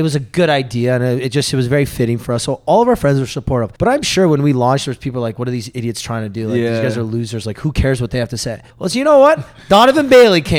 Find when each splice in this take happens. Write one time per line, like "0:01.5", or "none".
0:03.8
0:08.7